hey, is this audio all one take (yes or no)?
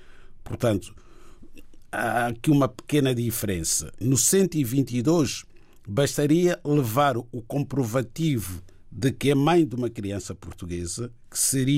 yes